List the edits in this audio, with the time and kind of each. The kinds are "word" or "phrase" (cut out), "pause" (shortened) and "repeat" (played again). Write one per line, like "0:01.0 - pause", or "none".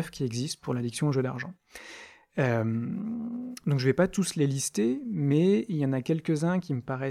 none